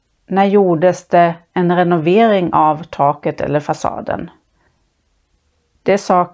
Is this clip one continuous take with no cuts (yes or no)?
yes